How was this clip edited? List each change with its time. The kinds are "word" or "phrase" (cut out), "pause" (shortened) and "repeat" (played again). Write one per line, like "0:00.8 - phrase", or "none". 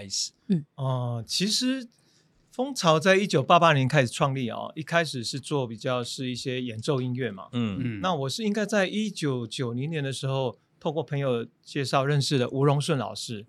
none